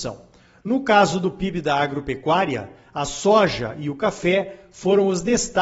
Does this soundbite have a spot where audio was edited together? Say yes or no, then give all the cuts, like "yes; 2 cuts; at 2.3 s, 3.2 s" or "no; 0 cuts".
no; 0 cuts